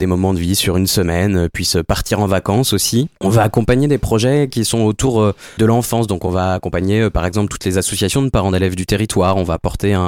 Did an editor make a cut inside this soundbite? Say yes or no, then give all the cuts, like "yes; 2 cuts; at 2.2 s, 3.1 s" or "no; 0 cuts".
yes; 2 cuts; at 3.2 s, 5.6 s